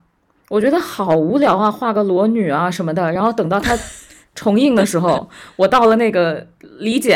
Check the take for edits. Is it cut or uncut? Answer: uncut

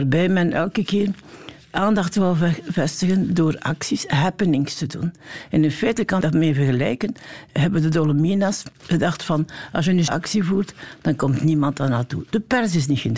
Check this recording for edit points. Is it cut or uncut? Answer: cut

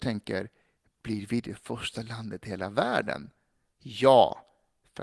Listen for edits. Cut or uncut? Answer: uncut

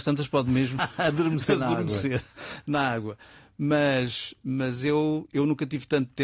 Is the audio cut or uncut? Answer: uncut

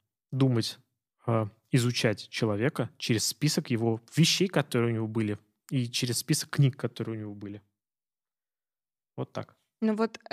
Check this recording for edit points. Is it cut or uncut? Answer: uncut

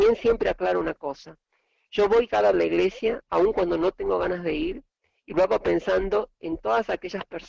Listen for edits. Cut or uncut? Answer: cut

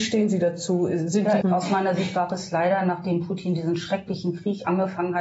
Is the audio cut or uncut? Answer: cut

